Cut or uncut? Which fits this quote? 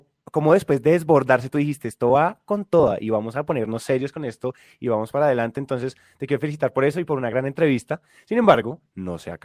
uncut